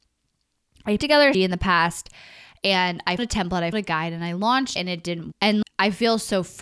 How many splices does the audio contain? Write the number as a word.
seven